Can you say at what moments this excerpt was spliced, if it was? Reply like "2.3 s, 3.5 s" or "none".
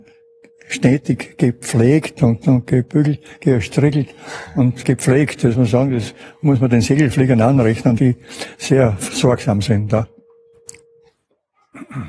2.4 s, 4.8 s, 5.5 s, 8.0 s